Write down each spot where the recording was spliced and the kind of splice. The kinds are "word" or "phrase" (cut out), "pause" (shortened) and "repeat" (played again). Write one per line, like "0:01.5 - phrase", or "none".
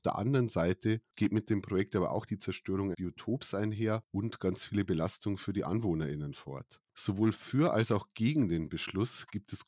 0:02.9 - word